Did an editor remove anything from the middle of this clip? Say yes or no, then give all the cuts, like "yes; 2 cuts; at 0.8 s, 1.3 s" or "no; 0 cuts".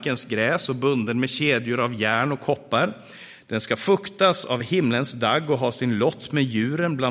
no; 0 cuts